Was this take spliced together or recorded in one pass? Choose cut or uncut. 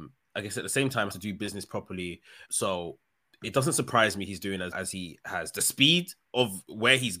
cut